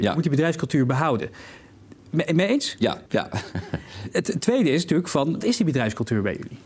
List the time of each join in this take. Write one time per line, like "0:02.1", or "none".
0:02.0
0:03.1
0:05.4

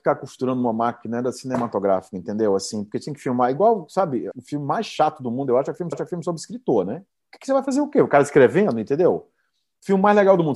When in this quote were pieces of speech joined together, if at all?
0:04.3
0:05.9
0:07.1

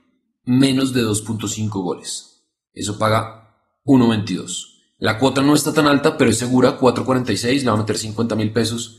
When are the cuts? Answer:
none

